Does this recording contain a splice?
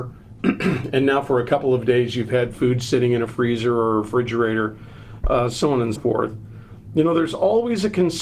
yes; 1 cut; at 6.0 s

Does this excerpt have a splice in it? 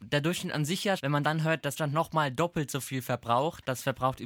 yes; 2 cuts; at 1.0 s, 1.8 s

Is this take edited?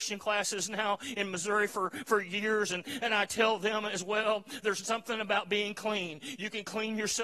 no; 0 cuts

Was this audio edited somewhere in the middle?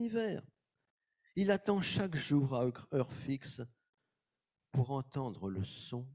no; 0 cuts

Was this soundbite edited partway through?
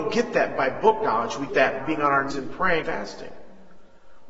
yes; 4 cuts; at 1.5 s, 1.8 s, 2.3 s, 2.8 s

